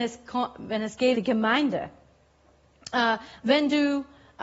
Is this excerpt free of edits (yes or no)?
no